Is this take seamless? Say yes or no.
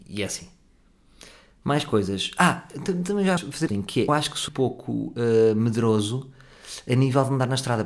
no